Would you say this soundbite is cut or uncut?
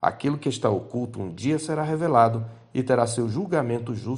uncut